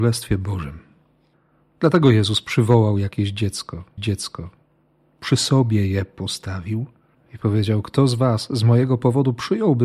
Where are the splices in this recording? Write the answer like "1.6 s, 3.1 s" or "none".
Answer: 4.0 s, 7.1 s